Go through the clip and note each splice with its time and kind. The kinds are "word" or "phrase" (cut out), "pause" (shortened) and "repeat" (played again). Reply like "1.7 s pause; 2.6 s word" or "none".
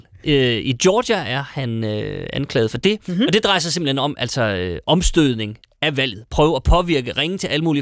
none